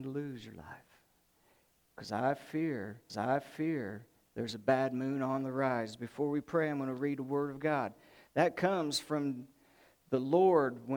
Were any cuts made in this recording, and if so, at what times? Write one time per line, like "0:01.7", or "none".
0:03.1